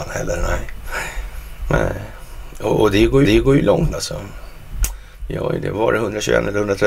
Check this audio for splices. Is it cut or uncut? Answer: cut